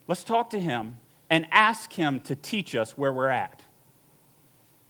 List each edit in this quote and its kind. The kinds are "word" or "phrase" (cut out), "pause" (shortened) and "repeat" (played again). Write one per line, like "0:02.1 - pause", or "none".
0:01.1 - pause